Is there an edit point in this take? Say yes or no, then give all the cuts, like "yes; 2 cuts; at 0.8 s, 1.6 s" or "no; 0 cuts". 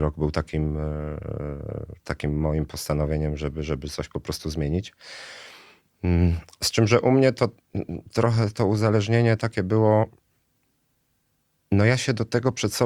no; 0 cuts